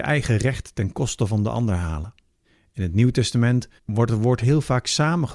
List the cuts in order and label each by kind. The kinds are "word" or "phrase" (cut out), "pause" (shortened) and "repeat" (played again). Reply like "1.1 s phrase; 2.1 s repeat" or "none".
2.4 s pause; 3.8 s pause